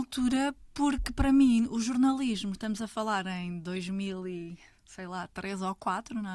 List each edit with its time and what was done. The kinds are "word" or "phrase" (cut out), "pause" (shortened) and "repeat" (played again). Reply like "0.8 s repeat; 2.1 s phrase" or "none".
none